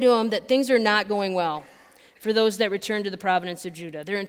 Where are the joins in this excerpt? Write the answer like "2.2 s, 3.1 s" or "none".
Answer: none